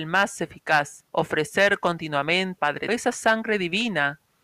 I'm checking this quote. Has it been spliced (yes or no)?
yes